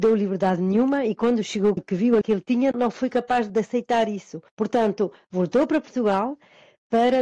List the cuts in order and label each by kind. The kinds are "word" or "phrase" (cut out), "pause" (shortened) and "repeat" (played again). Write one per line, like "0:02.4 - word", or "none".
0:01.8 - word
0:02.2 - word
0:02.7 - word
0:03.5 - word